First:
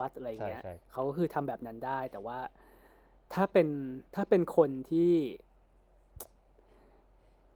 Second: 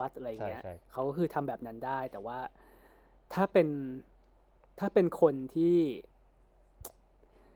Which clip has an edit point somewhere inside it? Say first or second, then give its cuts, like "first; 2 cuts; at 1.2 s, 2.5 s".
first; 1 cut; at 4.1 s